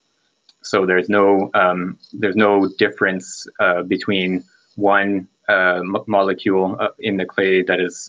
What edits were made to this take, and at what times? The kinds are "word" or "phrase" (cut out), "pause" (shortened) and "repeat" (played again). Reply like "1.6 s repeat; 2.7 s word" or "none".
none